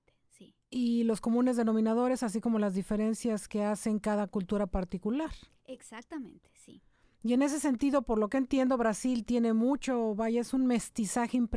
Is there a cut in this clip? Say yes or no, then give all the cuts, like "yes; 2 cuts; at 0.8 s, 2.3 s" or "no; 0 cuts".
no; 0 cuts